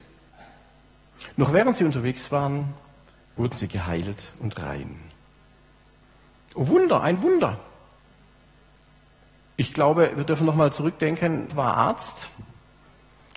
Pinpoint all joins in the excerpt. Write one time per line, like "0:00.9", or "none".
0:11.5